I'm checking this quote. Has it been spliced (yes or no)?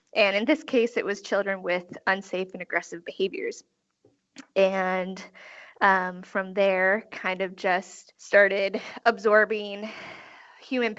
yes